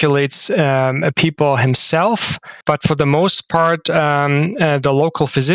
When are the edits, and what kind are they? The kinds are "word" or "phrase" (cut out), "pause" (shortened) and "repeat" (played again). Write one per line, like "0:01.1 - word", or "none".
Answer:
0:02.6 - pause